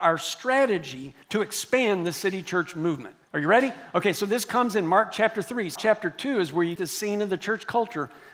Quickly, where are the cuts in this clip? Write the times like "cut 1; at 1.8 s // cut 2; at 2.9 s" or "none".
cut 1; at 1.2 s // cut 2; at 3.2 s // cut 3; at 5.8 s // cut 4; at 6.8 s